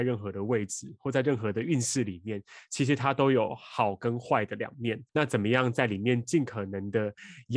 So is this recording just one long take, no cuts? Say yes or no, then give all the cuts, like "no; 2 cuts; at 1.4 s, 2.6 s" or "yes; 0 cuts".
no; 1 cut; at 5.1 s